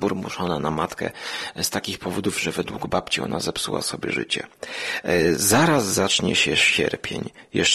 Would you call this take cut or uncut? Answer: uncut